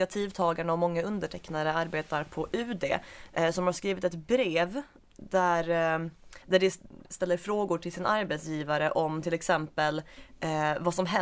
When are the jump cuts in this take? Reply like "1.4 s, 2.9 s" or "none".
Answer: 5.0 s, 6.4 s